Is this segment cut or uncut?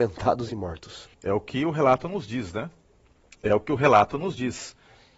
cut